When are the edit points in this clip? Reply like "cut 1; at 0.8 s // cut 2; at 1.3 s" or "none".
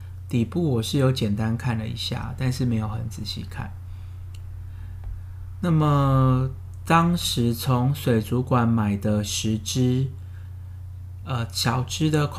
none